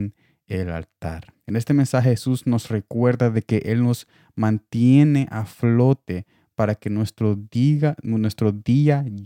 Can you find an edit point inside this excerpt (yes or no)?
yes